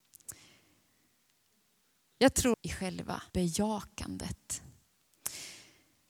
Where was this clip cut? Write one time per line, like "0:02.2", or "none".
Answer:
0:02.5
0:03.3